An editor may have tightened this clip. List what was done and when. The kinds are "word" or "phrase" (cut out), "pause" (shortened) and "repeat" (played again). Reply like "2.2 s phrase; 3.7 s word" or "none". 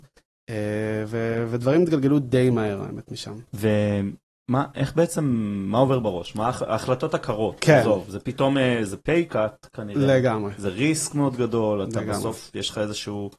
3.5 s pause